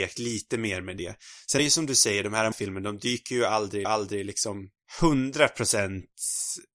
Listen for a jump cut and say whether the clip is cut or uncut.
cut